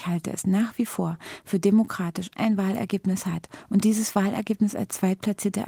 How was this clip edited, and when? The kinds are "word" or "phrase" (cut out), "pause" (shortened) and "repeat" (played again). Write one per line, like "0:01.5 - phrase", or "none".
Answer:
0:02.4 - phrase

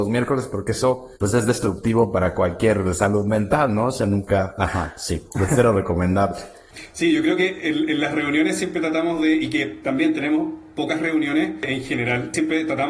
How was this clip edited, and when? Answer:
0:01.1 - pause

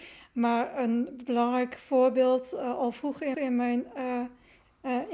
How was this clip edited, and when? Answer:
0:03.3 - repeat

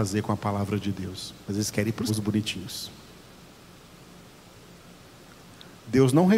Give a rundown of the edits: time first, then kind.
0:01.4 - pause
0:02.1 - word

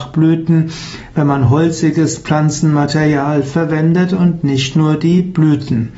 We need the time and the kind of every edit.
none

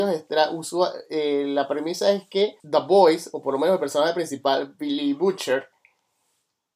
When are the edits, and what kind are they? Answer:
0:02.6 - pause

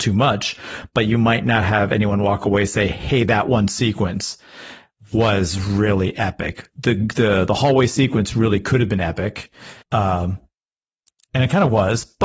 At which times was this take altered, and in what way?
0:09.8 - pause

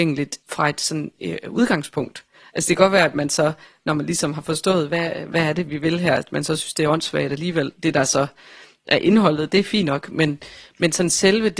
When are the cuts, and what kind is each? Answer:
none

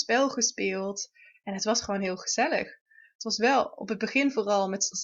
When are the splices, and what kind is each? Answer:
none

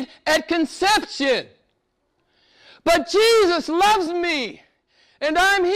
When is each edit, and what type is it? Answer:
none

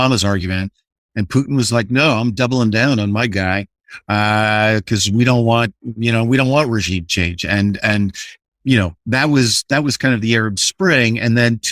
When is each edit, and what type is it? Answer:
none

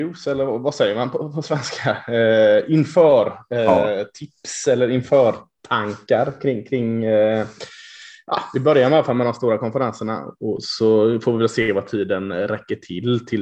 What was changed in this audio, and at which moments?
none

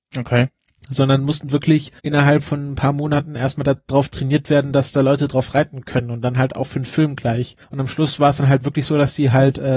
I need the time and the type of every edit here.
0:02.0 - pause
0:07.6 - pause

